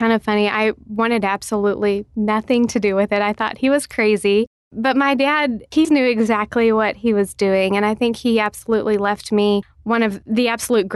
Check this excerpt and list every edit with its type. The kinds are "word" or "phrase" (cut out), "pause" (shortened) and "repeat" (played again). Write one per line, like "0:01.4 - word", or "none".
0:05.8 - word